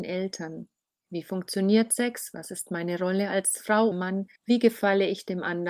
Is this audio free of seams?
no; 2 cuts; at 3.9 s, 4.4 s

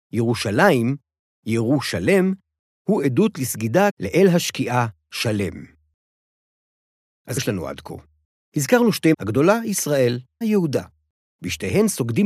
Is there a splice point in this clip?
yes; 4 cuts; at 3.9 s, 7.4 s, 9.1 s, 10.4 s

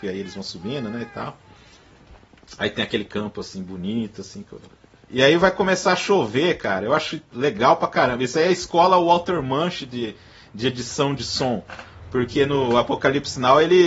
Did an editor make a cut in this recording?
no; 0 cuts

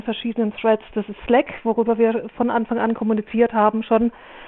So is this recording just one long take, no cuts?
yes; 0 cuts

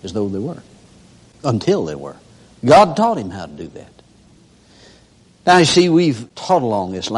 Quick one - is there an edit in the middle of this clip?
no; 0 cuts

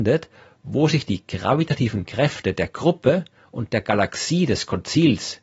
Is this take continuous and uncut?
yes; 0 cuts

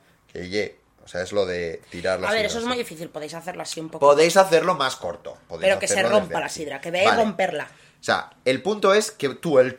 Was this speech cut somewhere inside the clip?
no; 0 cuts

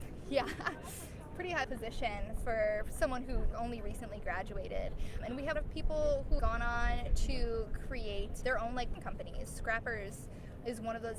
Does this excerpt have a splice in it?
yes; 8 cuts; at 1.6 s, 3.5 s, 5.2 s, 5.5 s, 6.4 s, 8.4 s, 8.9 s, 9.5 s

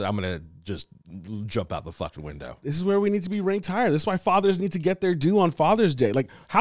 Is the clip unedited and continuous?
yes; 0 cuts

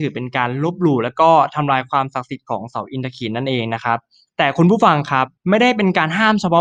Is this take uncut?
yes; 0 cuts

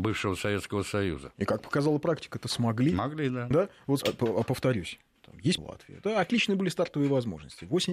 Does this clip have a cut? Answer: yes; 2 cuts; at 4.0 s, 5.6 s

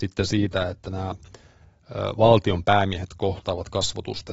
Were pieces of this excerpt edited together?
no; 0 cuts

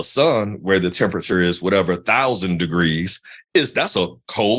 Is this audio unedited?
yes; 0 cuts

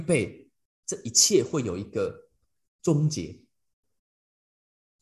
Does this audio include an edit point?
no; 0 cuts

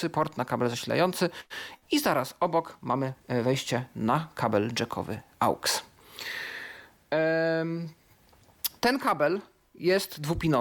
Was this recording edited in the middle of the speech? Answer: yes; 3 cuts; at 1.8 s, 3.2 s, 8.8 s

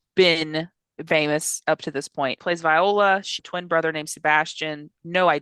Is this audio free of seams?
no; 2 cuts; at 1.1 s, 3.4 s

